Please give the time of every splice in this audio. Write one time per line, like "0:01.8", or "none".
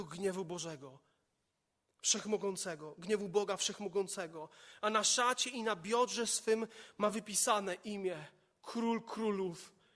none